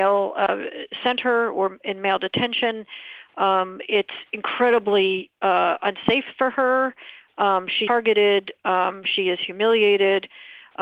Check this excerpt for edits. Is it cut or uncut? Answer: cut